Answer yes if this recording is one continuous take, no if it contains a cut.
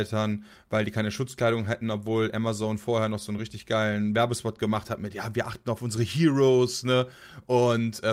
yes